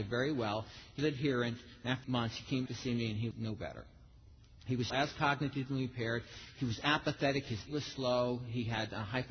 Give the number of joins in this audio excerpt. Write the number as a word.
six